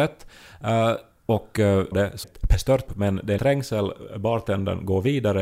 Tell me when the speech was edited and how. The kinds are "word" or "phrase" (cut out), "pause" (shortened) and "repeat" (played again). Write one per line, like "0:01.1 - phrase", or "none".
0:01.9 - phrase
0:02.2 - phrase
0:02.9 - word
0:03.4 - word